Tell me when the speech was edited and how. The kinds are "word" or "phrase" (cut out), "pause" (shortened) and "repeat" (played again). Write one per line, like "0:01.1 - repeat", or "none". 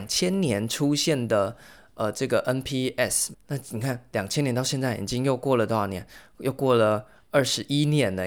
0:03.3 - word